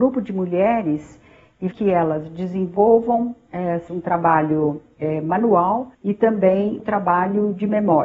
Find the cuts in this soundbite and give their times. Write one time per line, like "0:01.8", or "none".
0:01.7
0:03.9
0:05.9
0:06.8